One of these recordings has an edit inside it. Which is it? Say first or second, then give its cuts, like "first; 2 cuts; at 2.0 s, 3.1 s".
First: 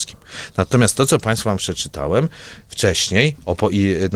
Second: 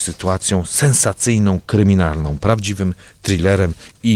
first; 1 cut; at 1.6 s